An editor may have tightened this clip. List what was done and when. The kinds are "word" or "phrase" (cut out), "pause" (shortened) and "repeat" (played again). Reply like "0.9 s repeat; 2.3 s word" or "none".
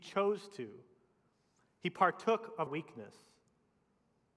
2.7 s word

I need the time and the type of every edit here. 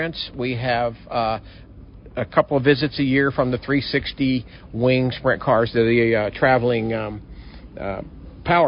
none

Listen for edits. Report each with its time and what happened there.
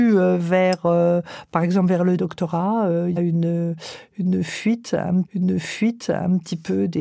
3.2 s phrase; 5.2 s repeat

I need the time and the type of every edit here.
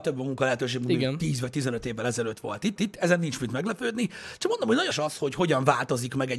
2.8 s repeat; 4.9 s word

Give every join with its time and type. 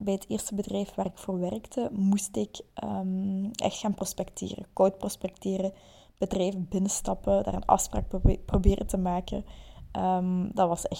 none

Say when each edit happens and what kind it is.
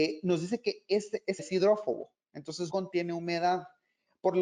1.4 s word; 2.7 s word

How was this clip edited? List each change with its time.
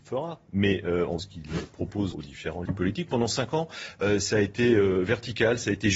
1.2 s word; 2.1 s word; 2.7 s phrase

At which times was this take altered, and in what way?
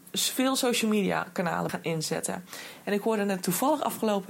1.7 s word

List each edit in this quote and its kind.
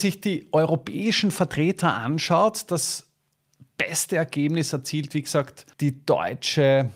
5.7 s pause

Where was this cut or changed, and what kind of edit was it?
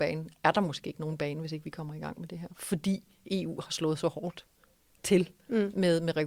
none

